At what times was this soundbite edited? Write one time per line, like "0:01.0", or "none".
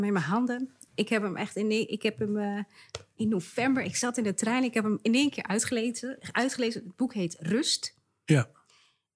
none